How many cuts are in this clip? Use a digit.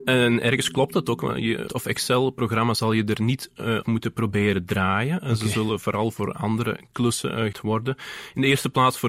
3